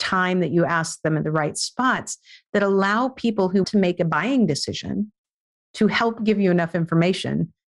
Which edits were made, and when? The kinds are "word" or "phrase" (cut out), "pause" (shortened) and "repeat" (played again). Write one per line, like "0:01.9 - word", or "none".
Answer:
0:03.6 - word